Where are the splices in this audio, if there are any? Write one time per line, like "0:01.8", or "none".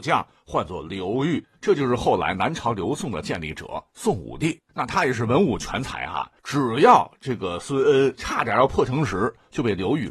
0:04.7
0:06.4